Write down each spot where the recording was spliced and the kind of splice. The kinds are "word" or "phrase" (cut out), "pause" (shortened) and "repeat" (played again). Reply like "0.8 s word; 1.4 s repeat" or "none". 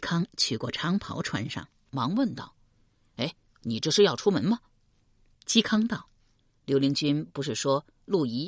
none